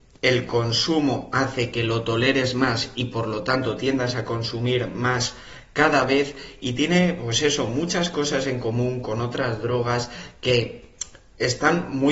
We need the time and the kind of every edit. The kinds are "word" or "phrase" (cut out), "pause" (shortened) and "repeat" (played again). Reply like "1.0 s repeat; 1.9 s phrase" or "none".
none